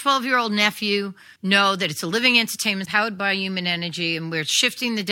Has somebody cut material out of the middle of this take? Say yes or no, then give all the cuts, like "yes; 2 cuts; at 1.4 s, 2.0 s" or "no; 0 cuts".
yes; 2 cuts; at 1.4 s, 2.9 s